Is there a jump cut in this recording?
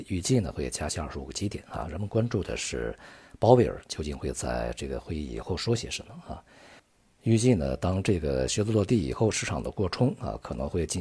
no; 0 cuts

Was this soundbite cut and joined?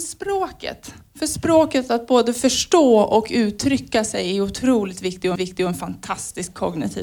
yes; 1 cut; at 5.4 s

